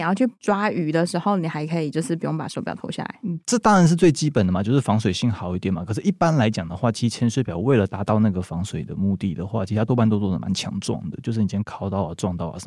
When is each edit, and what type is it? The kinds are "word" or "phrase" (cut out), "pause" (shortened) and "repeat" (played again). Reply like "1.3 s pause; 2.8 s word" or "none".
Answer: none